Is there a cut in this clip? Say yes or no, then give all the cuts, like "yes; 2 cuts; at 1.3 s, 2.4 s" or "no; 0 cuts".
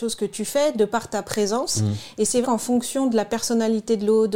yes; 1 cut; at 2.4 s